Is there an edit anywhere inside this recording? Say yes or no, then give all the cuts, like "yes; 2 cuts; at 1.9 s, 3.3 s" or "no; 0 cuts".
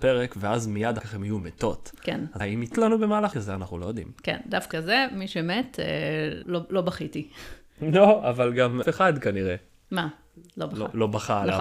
yes; 7 cuts; at 1.0 s, 2.4 s, 2.7 s, 3.3 s, 4.7 s, 6.4 s, 8.8 s